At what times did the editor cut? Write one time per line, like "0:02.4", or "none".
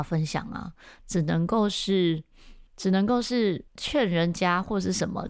0:02.7
0:03.7